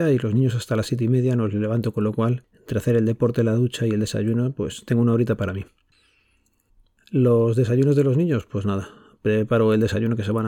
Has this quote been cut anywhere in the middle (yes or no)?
no